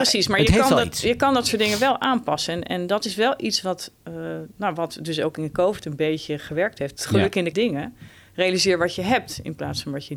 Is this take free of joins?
no; 1 cut; at 7.5 s

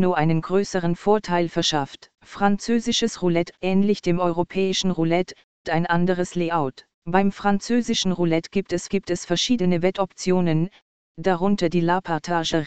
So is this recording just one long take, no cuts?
no; 4 cuts; at 2.1 s, 5.6 s, 6.9 s, 8.9 s

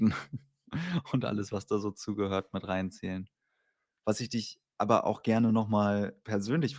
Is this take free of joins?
yes; 0 cuts

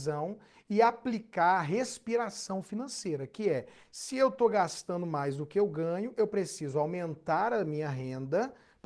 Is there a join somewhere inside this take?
no; 0 cuts

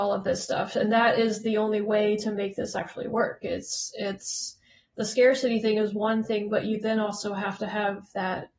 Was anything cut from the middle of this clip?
no; 0 cuts

